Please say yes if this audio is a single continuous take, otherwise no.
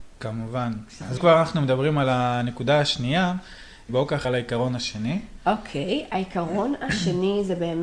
no